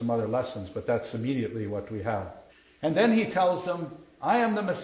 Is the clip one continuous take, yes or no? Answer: no